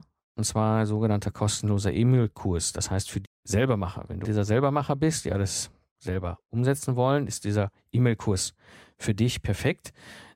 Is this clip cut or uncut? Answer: cut